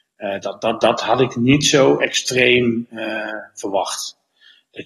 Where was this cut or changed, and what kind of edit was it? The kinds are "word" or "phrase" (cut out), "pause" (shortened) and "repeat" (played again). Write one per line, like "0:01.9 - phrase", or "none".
none